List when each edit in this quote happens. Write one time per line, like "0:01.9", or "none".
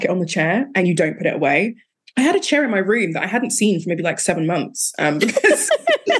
none